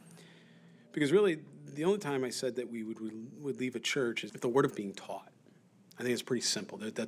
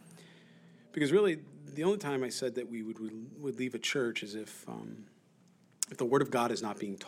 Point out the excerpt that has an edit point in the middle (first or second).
first